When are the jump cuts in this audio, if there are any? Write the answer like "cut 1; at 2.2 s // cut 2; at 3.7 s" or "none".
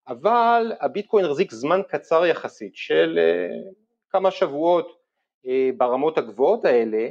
none